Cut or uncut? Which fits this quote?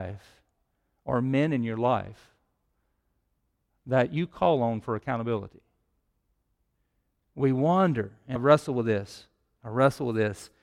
cut